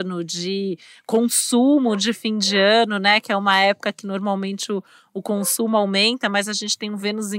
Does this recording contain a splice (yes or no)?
no